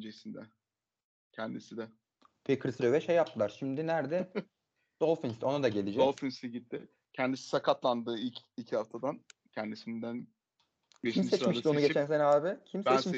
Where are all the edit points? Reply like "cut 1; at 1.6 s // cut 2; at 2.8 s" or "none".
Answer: cut 1; at 2.8 s

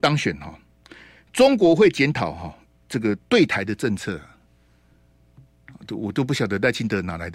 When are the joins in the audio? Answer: none

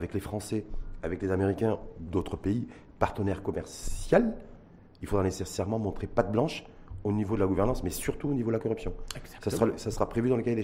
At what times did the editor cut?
none

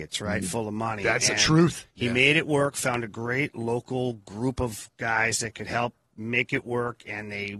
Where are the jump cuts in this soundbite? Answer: none

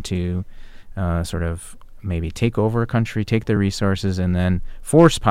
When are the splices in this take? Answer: none

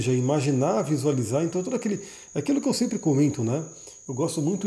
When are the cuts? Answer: none

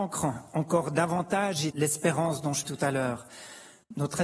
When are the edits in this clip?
cut 1; at 1.7 s // cut 2; at 2.6 s

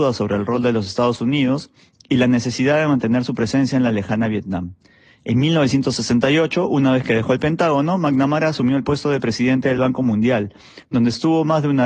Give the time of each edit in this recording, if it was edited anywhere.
none

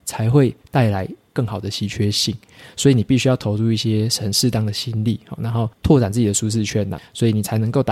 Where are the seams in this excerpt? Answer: cut 1; at 5.7 s // cut 2; at 7.0 s

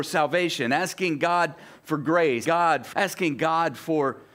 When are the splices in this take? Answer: cut 1; at 2.4 s // cut 2; at 2.9 s

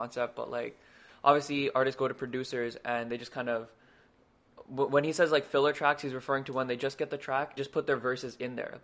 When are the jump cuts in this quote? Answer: cut 1; at 7.6 s

